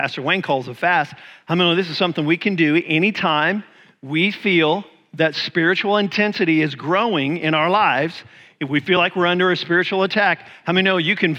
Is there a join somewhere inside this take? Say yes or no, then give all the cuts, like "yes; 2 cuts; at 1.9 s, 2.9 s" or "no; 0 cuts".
no; 0 cuts